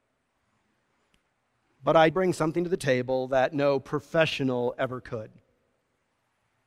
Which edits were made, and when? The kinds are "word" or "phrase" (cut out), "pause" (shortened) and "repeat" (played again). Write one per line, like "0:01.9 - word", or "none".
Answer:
0:02.1 - word